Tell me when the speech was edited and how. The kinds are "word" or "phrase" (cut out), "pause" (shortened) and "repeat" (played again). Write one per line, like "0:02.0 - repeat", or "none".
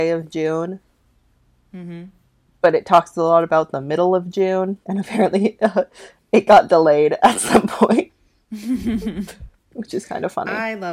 0:02.3 - pause
0:04.8 - pause